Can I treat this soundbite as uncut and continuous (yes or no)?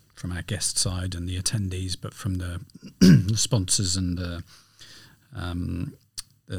yes